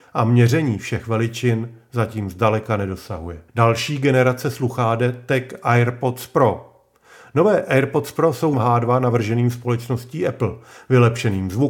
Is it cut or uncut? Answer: cut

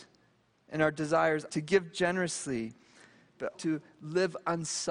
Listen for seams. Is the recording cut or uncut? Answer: cut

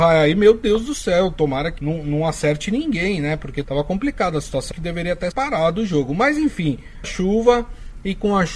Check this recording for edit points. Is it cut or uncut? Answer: cut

